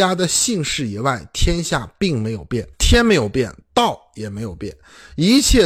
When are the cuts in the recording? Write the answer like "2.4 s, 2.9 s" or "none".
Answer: 2.7 s